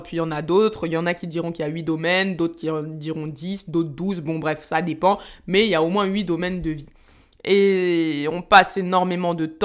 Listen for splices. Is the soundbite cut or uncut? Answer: uncut